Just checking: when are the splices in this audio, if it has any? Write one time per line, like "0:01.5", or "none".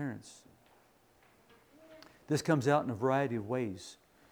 none

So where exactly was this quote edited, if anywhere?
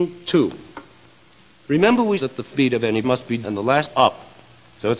0:02.2
0:02.5
0:03.0
0:03.4
0:03.9

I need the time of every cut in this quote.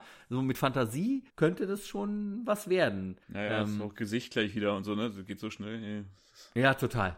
0:01.3
0:03.2

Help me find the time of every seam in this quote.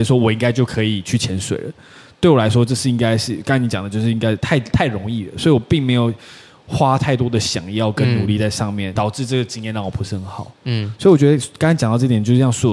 0:09.0

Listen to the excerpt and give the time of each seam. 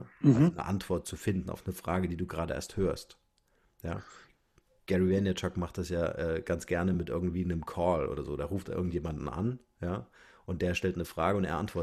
none

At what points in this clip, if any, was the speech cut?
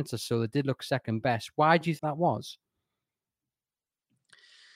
0:02.0

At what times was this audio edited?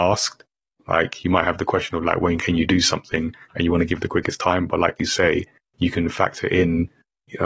none

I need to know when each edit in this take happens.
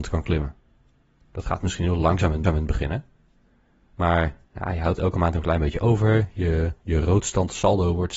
0:02.4
0:04.5

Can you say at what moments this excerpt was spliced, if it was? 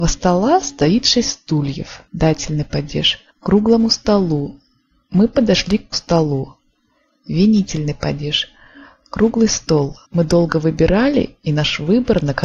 0:02.1
0:03.3
0:05.9
0:10.0

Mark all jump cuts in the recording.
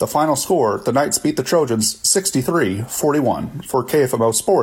none

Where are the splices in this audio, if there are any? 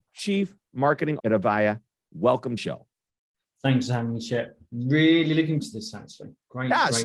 0:01.2
0:02.6
0:05.6

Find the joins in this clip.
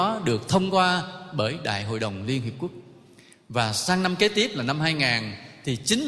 none

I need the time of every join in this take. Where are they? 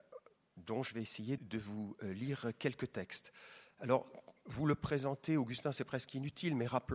0:01.4

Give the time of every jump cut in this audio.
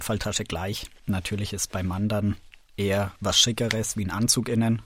none

